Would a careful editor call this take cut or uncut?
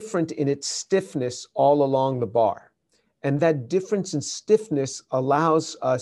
uncut